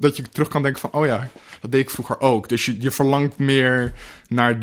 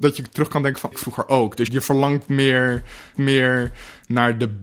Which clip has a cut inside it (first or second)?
second